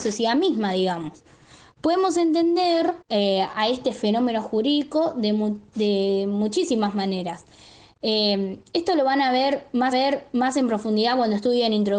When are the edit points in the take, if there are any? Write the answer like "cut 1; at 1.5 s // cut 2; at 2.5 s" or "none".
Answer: cut 1; at 3.0 s // cut 2; at 9.9 s

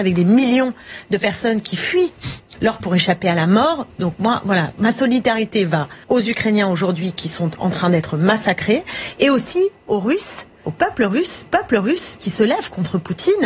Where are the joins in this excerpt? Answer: cut 1; at 2.8 s // cut 2; at 4.7 s // cut 3; at 6.0 s // cut 4; at 10.6 s // cut 5; at 11.5 s

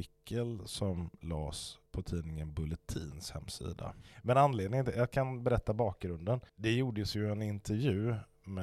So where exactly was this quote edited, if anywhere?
cut 1; at 1.9 s // cut 2; at 6.5 s

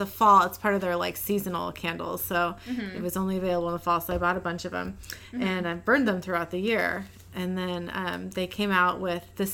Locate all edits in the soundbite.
none

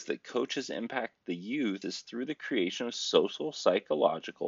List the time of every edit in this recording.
cut 1; at 1.8 s

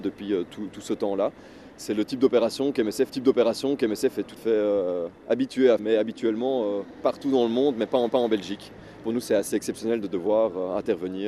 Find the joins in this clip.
cut 1; at 3.1 s // cut 2; at 4.4 s // cut 3; at 5.2 s // cut 4; at 5.8 s // cut 5; at 8.1 s // cut 6; at 9.0 s

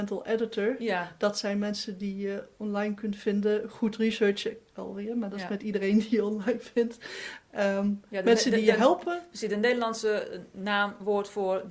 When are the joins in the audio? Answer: none

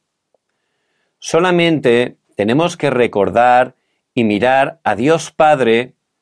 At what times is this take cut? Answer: none

